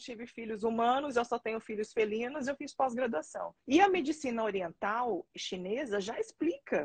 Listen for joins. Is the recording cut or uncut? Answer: cut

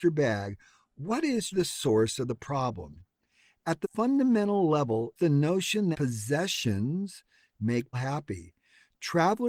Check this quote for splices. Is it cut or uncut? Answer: cut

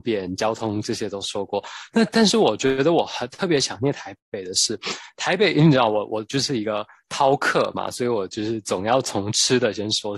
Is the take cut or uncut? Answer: uncut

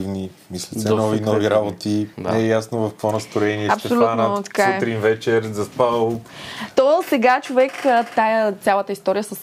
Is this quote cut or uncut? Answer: cut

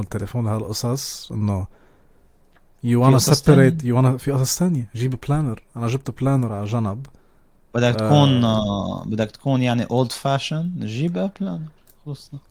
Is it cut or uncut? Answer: uncut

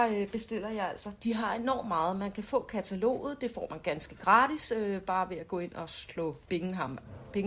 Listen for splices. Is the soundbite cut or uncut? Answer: uncut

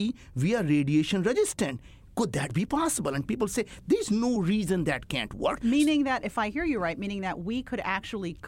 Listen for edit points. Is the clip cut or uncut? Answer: uncut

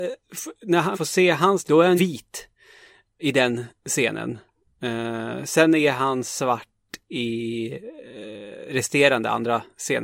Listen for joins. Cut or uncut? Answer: cut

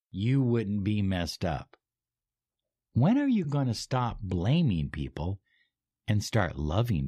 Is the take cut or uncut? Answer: uncut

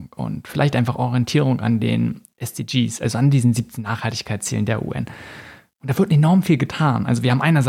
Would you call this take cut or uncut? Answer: uncut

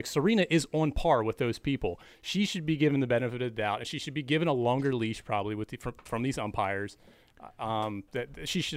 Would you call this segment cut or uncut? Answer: uncut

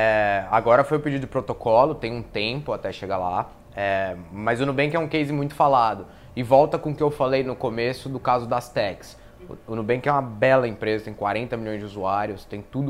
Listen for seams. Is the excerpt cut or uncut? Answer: uncut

